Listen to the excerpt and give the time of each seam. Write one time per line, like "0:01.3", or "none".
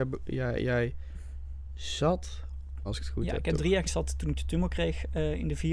0:02.9
0:03.8